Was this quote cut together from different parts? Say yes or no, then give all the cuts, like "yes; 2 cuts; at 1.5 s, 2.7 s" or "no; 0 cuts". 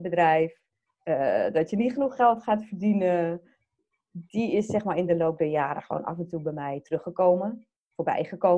no; 0 cuts